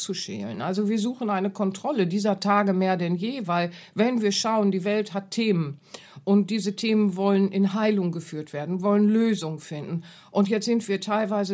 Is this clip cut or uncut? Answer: uncut